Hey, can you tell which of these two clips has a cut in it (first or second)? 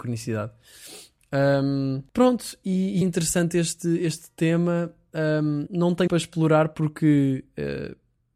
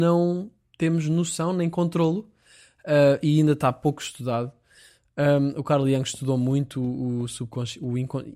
first